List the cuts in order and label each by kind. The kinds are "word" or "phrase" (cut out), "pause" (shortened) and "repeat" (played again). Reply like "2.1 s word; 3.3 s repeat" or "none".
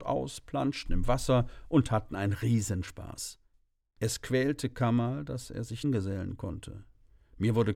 5.8 s phrase